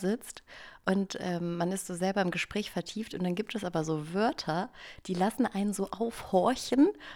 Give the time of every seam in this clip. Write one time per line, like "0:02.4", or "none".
none